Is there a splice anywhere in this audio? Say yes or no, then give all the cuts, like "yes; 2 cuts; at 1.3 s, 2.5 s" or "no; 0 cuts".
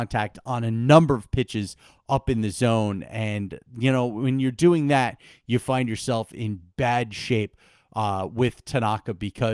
no; 0 cuts